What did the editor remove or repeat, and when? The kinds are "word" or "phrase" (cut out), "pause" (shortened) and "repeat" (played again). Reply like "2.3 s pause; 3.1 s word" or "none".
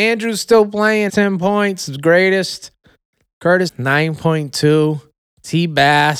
1.1 s word; 3.7 s word